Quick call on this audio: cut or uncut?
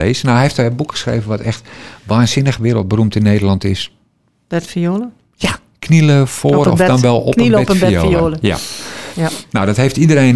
uncut